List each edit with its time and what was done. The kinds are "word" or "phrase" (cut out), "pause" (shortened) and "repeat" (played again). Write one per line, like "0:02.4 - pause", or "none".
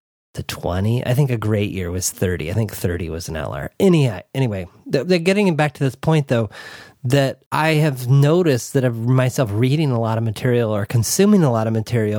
0:07.5 - pause

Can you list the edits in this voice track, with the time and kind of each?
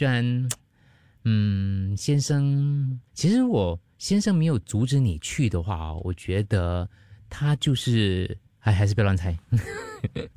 0:03.1 - pause
0:08.5 - pause

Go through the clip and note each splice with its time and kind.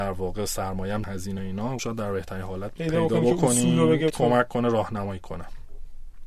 0:01.0 - phrase
0:01.4 - word
0:01.8 - word
0:02.8 - phrase
0:04.1 - word

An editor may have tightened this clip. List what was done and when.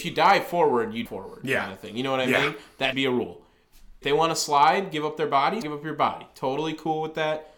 0:01.1 - word
0:02.9 - word
0:04.0 - word
0:05.6 - word

